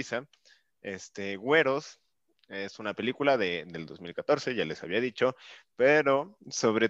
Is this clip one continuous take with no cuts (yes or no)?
yes